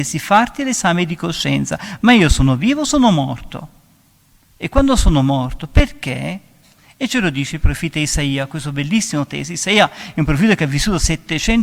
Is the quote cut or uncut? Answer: uncut